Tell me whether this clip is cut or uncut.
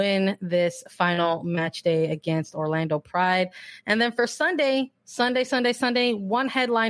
cut